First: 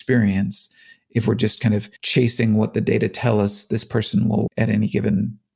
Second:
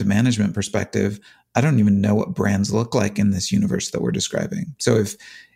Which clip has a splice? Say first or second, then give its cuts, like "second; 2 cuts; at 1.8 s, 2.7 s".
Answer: first; 2 cuts; at 2.0 s, 4.5 s